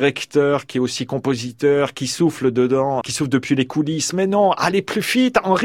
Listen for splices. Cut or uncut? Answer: cut